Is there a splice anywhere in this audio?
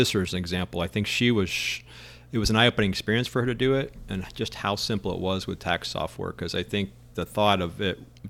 no; 0 cuts

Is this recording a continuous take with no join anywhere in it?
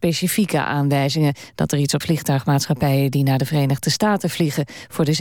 no; 1 cut; at 2.0 s

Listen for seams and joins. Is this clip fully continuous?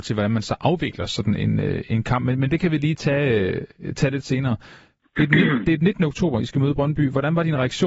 yes; 0 cuts

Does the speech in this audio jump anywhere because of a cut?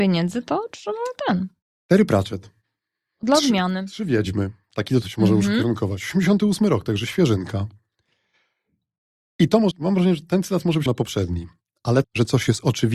yes; 4 cuts; at 5.0 s, 9.7 s, 10.9 s, 12.0 s

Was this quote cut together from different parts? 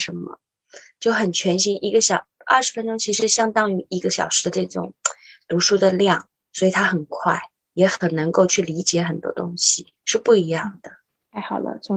yes; 1 cut; at 10.0 s

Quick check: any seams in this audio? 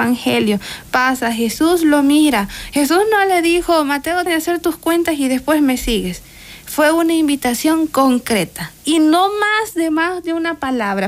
yes; 2 cuts; at 4.3 s, 8.8 s

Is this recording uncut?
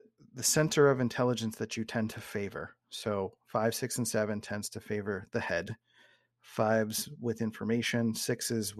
yes; 0 cuts

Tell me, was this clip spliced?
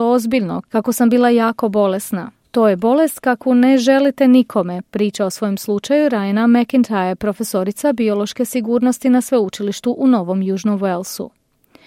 yes; 1 cut; at 2.4 s

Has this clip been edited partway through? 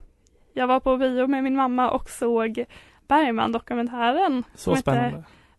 no; 0 cuts

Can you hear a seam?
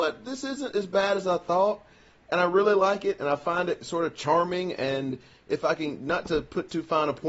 no; 0 cuts

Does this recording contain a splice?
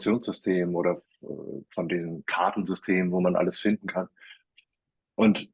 no; 0 cuts

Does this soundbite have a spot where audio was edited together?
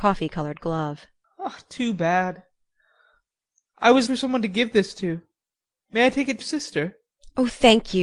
yes; 2 cuts; at 4.1 s, 6.4 s

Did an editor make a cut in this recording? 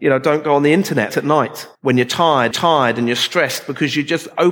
yes; 3 cuts; at 1.1 s, 1.7 s, 2.5 s

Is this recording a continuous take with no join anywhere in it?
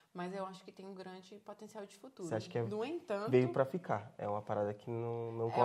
yes; 0 cuts

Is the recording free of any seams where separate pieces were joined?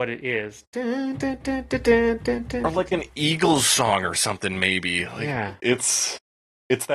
yes; 0 cuts

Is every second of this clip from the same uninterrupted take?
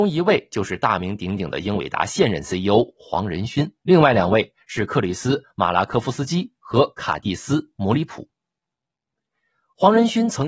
no; 1 cut; at 3.8 s

